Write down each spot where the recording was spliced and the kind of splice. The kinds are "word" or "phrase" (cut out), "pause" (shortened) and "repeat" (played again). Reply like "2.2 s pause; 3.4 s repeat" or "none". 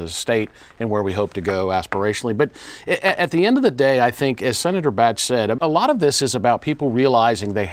5.6 s word